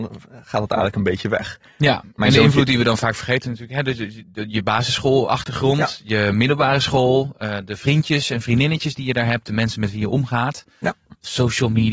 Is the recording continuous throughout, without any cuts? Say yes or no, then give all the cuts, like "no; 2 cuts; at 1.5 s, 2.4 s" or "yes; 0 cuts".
yes; 0 cuts